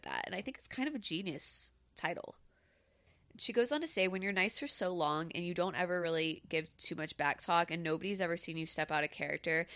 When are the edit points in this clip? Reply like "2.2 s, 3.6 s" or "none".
none